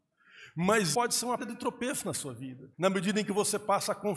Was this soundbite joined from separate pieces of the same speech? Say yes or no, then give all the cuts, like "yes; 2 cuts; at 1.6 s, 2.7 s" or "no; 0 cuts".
yes; 3 cuts; at 0.9 s, 1.4 s, 2.7 s